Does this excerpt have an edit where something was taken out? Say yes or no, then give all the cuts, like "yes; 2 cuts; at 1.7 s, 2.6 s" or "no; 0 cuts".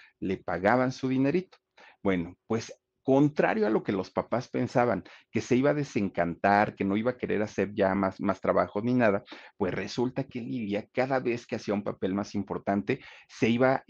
no; 0 cuts